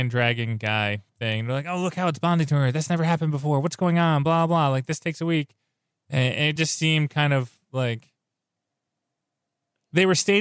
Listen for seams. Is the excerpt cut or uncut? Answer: uncut